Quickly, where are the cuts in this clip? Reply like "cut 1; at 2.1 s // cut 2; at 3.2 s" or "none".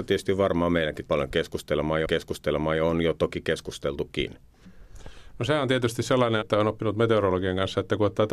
cut 1; at 1.1 s // cut 2; at 2.0 s // cut 3; at 6.4 s